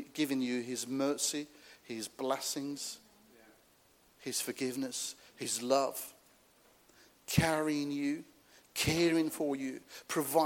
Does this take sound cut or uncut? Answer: uncut